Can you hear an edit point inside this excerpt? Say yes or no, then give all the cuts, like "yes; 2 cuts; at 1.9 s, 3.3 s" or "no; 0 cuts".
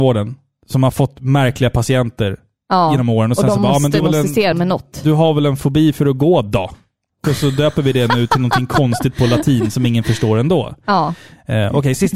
yes; 3 cuts; at 4.0 s, 4.5 s, 7.2 s